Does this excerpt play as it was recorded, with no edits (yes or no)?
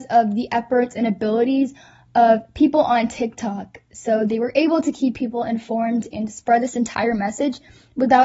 yes